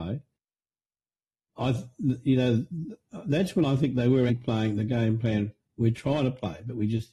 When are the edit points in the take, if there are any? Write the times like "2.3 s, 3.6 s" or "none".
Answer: 4.3 s